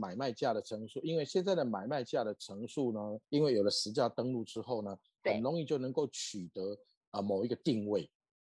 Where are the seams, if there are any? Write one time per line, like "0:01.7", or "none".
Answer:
0:03.2

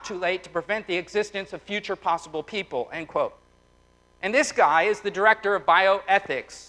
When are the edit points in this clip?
none

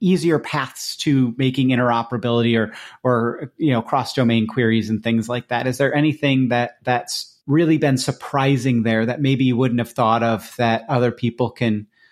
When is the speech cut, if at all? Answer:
0:07.4

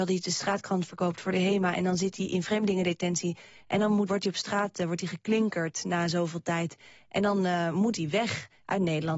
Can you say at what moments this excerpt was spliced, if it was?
0:04.1

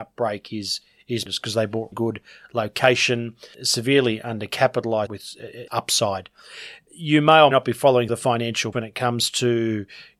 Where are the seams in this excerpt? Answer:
0:01.3
0:01.9
0:03.5
0:05.1
0:05.7
0:07.5
0:08.1
0:08.7

